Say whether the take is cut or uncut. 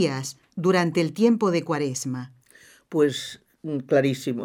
uncut